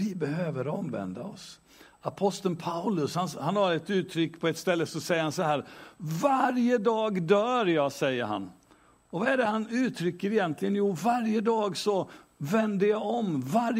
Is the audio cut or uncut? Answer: uncut